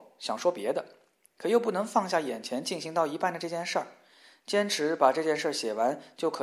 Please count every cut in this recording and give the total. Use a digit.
0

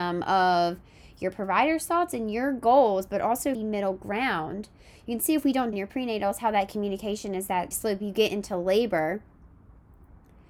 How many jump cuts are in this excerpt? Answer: 3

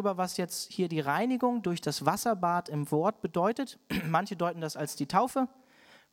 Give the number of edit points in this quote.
0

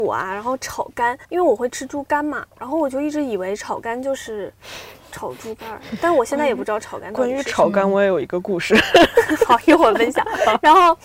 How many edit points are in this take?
2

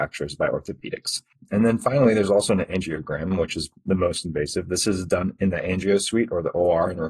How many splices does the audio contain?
0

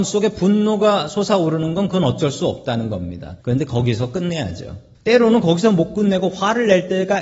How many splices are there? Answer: 2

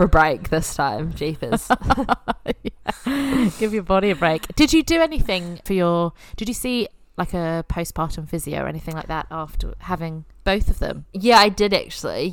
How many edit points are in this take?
1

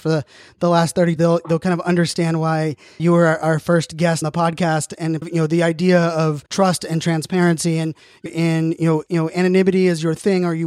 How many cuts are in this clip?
7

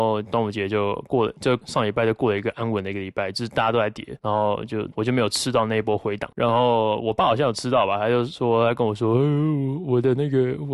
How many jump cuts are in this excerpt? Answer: 0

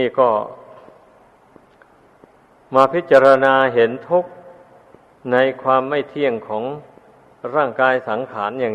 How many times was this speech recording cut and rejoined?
0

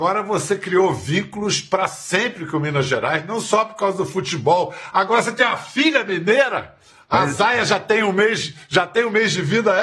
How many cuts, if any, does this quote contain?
0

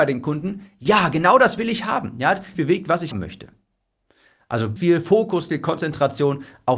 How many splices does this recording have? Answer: 4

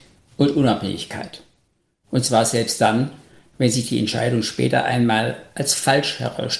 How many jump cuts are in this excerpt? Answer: 0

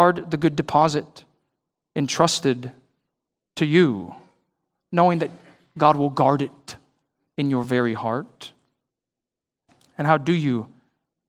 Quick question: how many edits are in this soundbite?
0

